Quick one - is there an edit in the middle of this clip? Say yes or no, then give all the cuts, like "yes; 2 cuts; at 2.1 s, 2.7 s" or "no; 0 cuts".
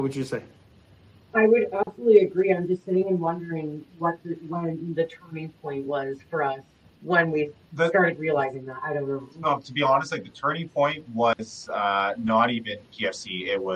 no; 0 cuts